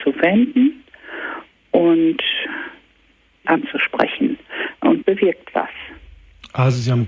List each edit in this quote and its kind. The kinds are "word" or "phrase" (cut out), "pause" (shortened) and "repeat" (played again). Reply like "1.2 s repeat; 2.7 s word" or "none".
3.4 s word; 5.0 s word